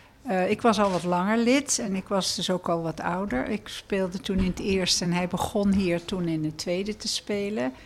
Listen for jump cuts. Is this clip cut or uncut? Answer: uncut